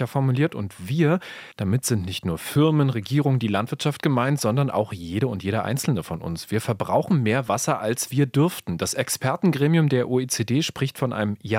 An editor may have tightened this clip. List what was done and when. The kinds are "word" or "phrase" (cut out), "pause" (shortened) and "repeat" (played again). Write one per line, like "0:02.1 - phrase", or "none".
0:01.5 - pause

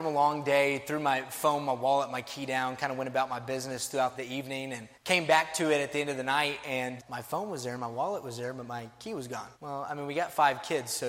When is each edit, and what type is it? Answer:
0:04.1 - word
0:04.9 - pause
0:07.0 - word
0:09.5 - pause

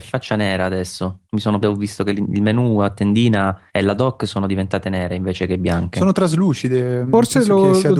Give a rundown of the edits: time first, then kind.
0:01.2 - pause
0:01.6 - phrase
0:03.7 - pause

